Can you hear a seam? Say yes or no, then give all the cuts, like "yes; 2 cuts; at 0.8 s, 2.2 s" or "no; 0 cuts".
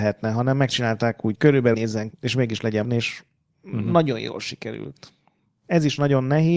yes; 4 cuts; at 1.3 s, 1.7 s, 2.1 s, 2.8 s